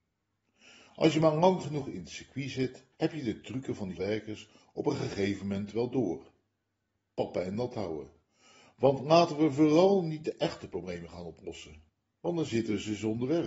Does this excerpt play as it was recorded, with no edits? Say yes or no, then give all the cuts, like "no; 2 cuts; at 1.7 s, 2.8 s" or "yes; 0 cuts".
no; 2 cuts; at 2.9 s, 4.0 s